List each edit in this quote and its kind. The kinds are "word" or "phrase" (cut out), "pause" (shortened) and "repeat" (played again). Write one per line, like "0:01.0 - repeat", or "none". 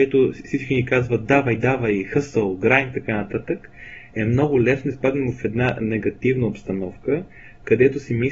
none